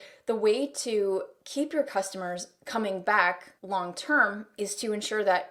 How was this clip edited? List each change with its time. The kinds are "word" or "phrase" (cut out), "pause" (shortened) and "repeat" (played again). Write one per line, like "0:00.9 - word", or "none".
0:03.6 - pause

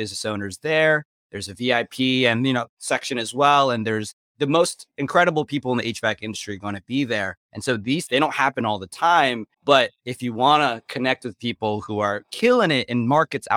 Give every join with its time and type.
0:07.4 - pause
0:08.1 - phrase
0:09.5 - pause

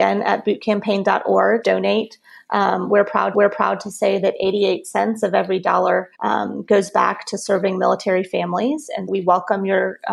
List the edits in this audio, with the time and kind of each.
0:01.6 - phrase
0:03.3 - repeat
0:06.1 - pause
0:09.1 - word

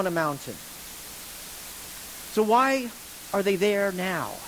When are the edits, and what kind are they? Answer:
none

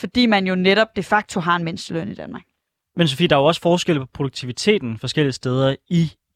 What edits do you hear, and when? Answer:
none

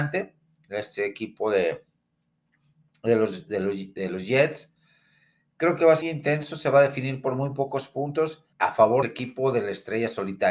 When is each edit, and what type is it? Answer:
0:06.0 - phrase
0:08.5 - pause
0:09.0 - word

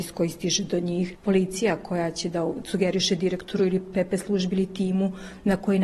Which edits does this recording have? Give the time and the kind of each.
none

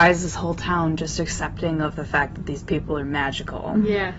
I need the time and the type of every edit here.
none

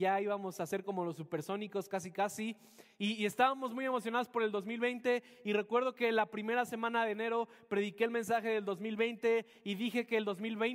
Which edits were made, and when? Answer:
none

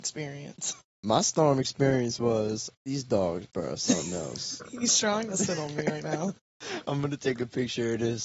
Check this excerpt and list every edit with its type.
0:02.7 - pause
0:06.4 - pause

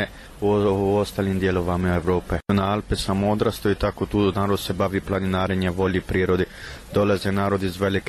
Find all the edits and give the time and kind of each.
none

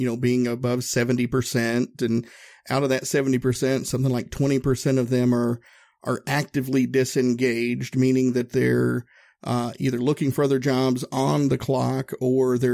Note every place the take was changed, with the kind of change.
none

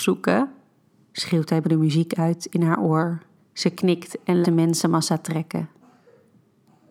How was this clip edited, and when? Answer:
0:01.6 - word
0:03.3 - pause
0:04.4 - phrase

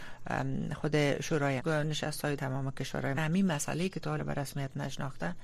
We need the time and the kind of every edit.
0:01.6 - word
0:02.4 - word
0:03.1 - word
0:04.2 - word

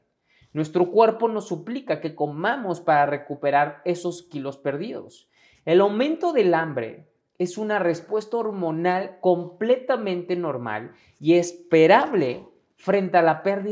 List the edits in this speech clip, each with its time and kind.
none

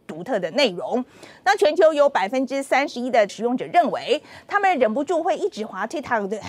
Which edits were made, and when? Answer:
0:03.3 - word

